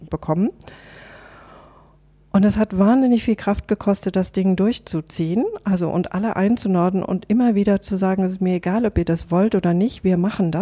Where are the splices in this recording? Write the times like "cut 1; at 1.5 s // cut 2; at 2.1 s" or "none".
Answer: none